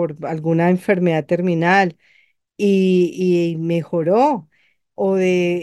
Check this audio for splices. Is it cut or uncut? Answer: uncut